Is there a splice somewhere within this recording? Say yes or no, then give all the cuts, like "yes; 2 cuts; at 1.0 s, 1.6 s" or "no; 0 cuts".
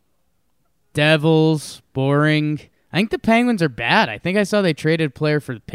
yes; 1 cut; at 2.7 s